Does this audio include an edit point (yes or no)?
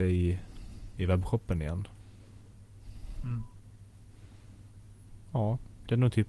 no